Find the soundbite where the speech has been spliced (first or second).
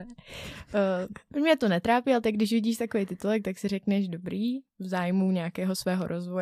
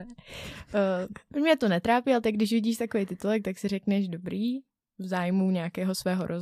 first